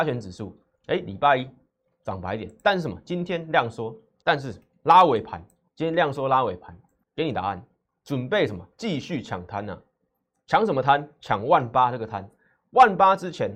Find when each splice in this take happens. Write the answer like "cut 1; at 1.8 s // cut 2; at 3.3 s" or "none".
cut 1; at 4.2 s // cut 2; at 5.7 s // cut 3; at 7.0 s